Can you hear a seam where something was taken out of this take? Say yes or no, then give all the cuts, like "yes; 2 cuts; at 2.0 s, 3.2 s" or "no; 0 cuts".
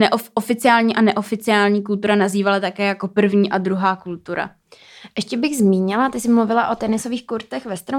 no; 0 cuts